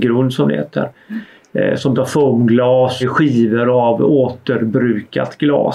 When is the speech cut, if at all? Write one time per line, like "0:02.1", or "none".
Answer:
0:02.0
0:03.0